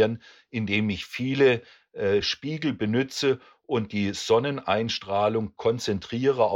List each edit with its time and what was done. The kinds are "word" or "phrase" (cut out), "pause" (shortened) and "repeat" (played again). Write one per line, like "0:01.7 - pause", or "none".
none

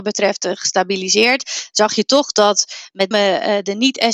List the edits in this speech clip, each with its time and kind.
0:03.1 - word

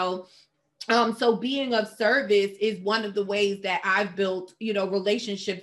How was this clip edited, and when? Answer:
none

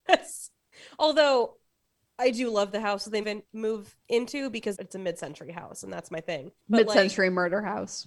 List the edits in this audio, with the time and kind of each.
0:03.2 - word
0:04.0 - pause
0:04.7 - word
0:06.6 - pause

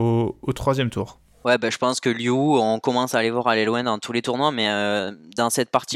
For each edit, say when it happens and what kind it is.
none

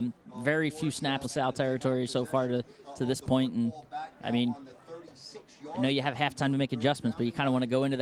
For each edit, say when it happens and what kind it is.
0:01.2 - word

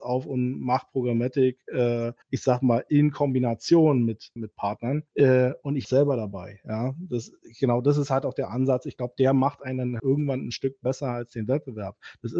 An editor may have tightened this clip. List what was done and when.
0:02.2 - pause
0:04.4 - word
0:05.1 - pause
0:05.8 - phrase
0:10.0 - word

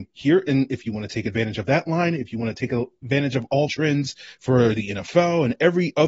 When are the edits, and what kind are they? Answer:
0:03.7 - phrase

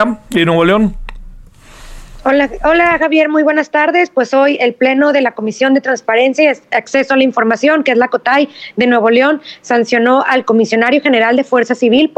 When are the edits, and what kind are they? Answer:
none

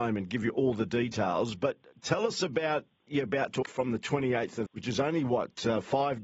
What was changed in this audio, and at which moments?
0:03.1 - word
0:03.6 - word
0:04.7 - word

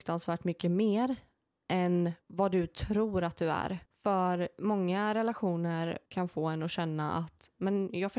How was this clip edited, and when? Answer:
0:02.2 - pause
0:03.9 - pause
0:06.1 - pause

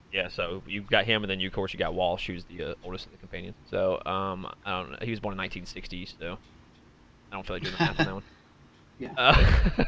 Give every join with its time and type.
0:03.6 - pause

